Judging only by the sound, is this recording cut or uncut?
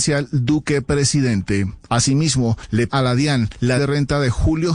cut